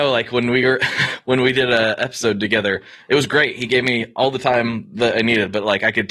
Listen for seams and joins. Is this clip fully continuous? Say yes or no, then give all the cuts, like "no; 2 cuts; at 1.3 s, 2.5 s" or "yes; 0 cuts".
yes; 0 cuts